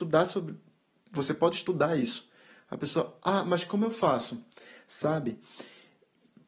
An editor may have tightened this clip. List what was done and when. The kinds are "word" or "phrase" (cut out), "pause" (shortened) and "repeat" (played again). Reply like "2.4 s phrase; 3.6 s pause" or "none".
none